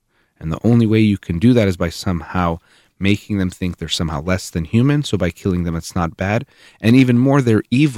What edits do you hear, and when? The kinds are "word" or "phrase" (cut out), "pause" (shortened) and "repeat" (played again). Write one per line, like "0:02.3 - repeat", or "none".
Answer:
none